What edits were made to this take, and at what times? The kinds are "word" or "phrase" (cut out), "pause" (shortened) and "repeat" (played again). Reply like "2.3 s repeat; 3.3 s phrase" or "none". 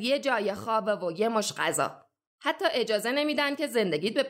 none